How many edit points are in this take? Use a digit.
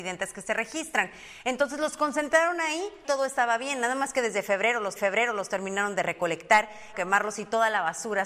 3